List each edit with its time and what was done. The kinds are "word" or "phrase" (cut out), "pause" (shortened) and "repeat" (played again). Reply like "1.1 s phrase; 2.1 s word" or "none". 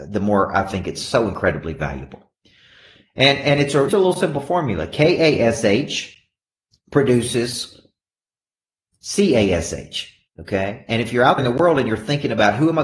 3.9 s word; 6.5 s pause; 10.3 s pause; 11.4 s word